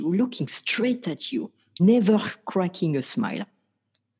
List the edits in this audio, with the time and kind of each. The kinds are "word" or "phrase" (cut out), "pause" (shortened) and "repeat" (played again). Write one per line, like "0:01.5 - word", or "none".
0:01.8 - word